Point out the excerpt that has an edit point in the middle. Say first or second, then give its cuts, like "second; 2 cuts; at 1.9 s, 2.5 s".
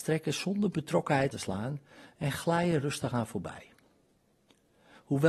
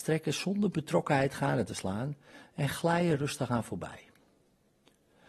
first; 1 cut; at 1.3 s